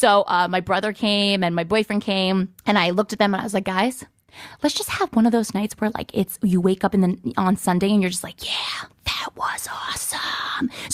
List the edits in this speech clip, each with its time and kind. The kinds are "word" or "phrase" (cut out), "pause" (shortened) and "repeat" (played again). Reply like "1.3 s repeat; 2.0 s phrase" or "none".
2.6 s pause; 8.9 s pause